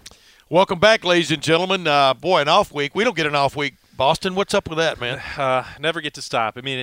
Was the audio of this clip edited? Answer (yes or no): no